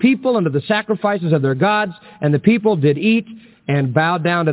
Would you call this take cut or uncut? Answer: uncut